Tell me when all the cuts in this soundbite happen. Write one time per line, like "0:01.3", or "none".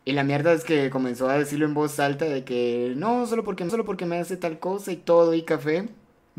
0:03.7